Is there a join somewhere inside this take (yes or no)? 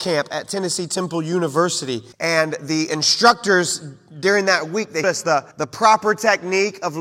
yes